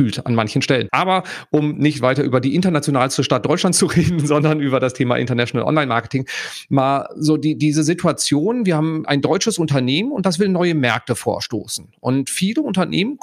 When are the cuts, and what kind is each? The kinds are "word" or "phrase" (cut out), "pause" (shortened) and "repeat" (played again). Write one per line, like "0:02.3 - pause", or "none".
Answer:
none